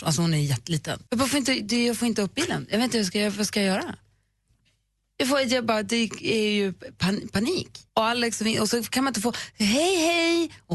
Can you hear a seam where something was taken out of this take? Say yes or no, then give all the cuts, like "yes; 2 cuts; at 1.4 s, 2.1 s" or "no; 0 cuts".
yes; 2 cuts; at 1.1 s, 7.9 s